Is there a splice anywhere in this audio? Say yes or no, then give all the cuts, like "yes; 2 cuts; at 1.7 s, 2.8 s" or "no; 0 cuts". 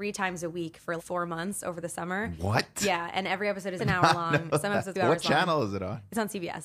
yes; 3 cuts; at 1.0 s, 3.8 s, 4.9 s